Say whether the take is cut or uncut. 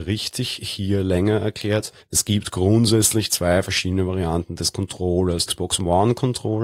cut